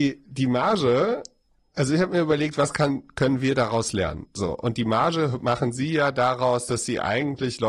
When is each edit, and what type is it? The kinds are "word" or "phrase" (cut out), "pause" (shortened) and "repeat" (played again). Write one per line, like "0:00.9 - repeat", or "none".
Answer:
none